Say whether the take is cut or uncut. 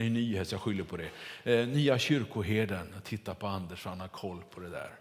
uncut